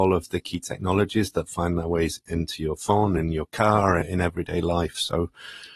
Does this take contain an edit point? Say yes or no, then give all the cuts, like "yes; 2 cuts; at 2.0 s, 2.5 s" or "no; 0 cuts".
no; 0 cuts